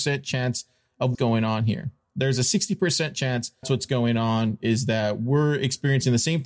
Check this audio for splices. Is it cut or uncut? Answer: cut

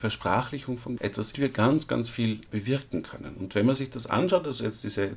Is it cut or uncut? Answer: cut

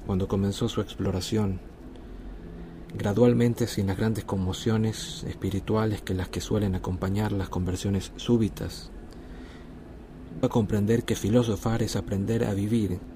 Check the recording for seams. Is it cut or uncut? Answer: cut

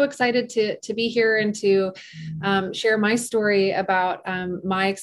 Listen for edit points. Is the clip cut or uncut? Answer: uncut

